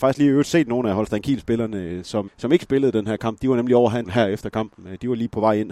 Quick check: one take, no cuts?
no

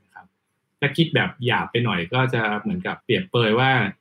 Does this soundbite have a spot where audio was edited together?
yes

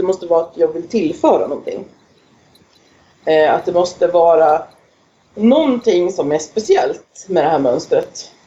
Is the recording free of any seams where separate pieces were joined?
yes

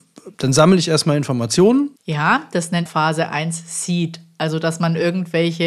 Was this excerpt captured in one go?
no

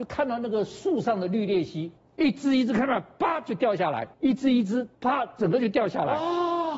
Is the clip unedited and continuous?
no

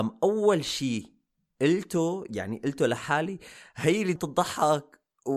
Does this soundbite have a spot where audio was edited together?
yes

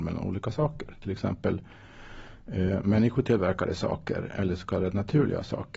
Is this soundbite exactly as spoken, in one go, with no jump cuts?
yes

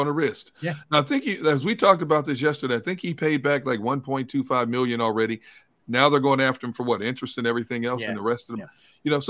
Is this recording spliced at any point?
no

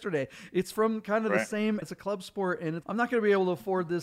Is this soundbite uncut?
no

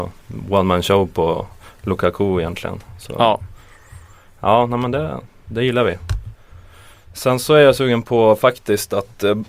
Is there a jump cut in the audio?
no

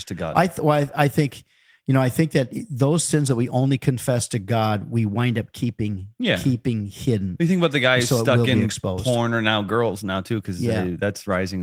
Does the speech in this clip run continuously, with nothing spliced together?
yes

